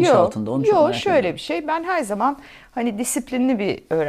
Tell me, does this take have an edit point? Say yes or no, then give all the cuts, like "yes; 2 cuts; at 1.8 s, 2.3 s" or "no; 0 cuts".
no; 0 cuts